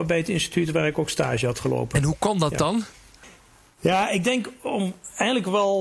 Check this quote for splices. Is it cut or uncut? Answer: uncut